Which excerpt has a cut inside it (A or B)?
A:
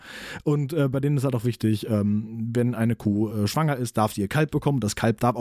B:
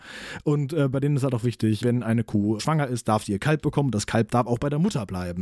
B